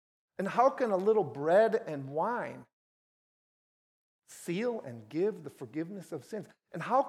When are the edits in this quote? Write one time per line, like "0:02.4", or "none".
none